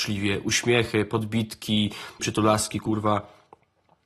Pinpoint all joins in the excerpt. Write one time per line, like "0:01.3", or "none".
0:02.2